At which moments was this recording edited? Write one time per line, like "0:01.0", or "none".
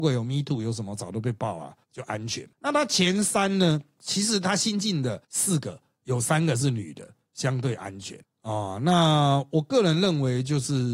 0:01.8
0:02.5
0:05.2
0:08.2